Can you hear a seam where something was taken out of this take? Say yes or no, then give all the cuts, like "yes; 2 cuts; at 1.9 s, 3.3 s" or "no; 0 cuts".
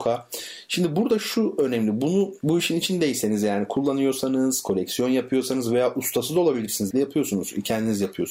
yes; 2 cuts; at 2.4 s, 6.9 s